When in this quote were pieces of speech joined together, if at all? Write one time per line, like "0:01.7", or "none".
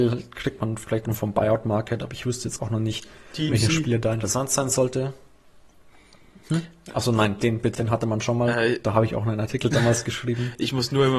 0:01.1
0:02.6
0:03.5
0:07.7